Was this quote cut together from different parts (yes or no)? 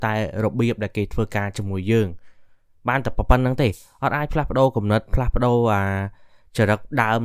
no